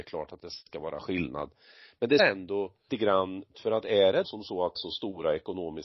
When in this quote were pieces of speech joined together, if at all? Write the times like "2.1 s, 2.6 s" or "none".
2.2 s, 2.9 s, 3.5 s, 4.2 s, 4.8 s